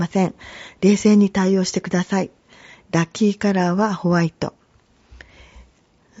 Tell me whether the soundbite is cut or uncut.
uncut